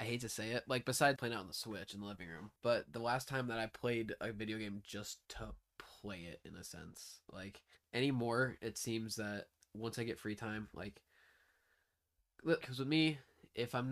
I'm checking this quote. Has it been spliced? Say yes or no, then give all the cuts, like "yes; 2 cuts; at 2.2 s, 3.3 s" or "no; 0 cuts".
yes; 6 cuts; at 1.2 s, 2.6 s, 5.2 s, 7.8 s, 9.6 s, 12.6 s